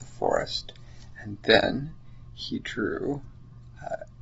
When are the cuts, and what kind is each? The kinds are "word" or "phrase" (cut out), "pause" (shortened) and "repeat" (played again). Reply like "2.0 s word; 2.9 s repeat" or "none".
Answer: none